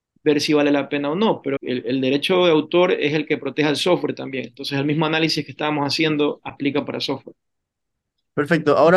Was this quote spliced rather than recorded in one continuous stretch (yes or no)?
yes